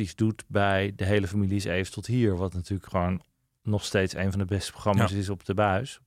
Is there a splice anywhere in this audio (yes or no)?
no